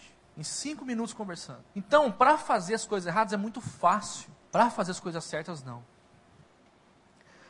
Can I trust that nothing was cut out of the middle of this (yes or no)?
no